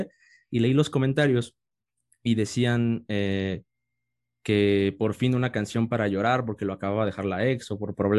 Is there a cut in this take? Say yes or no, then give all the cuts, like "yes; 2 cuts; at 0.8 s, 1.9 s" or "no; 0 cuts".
no; 0 cuts